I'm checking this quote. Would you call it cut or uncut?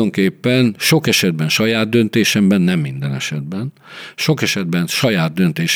uncut